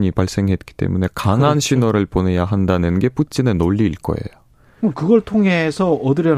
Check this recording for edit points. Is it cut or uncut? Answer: uncut